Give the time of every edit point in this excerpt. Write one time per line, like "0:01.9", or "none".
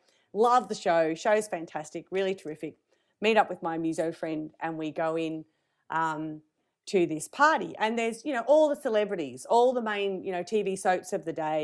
none